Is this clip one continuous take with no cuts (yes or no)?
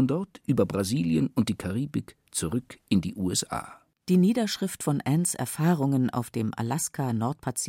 yes